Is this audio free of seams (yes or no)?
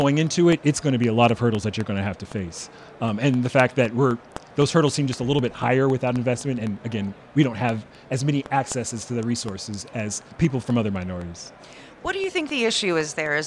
no